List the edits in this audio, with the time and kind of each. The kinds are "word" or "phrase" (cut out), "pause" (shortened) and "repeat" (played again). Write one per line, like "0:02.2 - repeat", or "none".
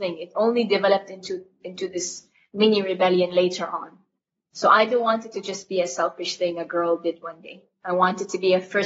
none